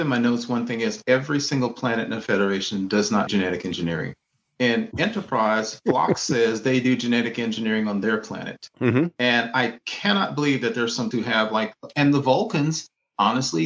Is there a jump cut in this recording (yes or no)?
yes